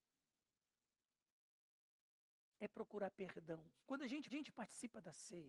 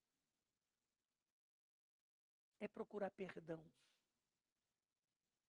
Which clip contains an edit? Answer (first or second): first